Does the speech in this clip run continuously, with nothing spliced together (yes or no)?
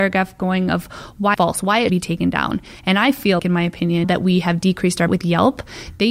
no